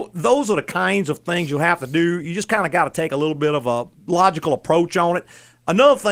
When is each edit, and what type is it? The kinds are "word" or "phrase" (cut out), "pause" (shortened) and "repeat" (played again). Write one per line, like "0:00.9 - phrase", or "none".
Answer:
none

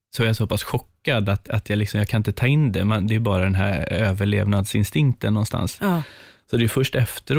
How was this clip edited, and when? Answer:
none

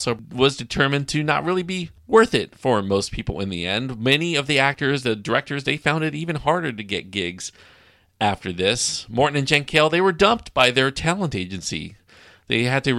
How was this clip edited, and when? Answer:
none

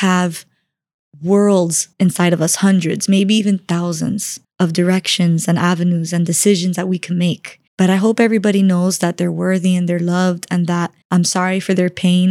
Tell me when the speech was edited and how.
0:01.9 - pause
0:04.4 - pause
0:07.7 - pause
0:11.0 - pause

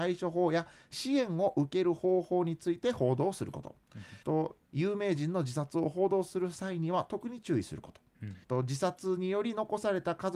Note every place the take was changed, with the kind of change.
0:04.2 - pause
0:08.4 - pause

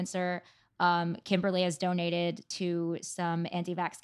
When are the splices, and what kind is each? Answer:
none

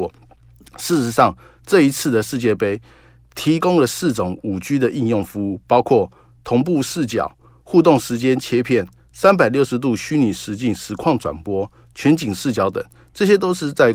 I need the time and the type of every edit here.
none

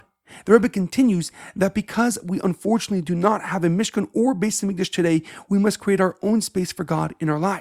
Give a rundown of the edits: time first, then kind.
none

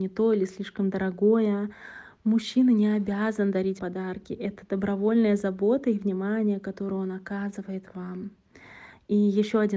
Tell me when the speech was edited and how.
0:03.8 - word

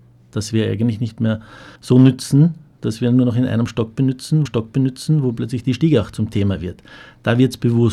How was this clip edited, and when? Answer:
0:01.8 - pause
0:04.5 - repeat

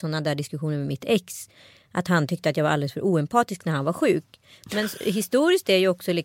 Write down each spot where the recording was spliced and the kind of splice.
none

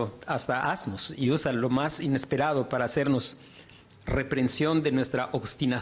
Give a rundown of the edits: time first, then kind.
none

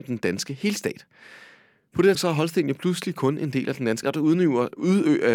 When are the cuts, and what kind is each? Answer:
0:02.1 - word
0:04.0 - word

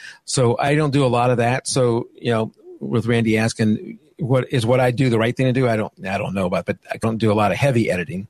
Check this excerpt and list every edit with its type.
0:06.6 - word
0:07.0 - word

